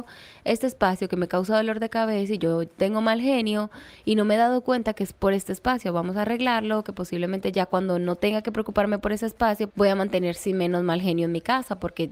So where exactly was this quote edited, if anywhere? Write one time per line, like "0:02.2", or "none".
0:09.7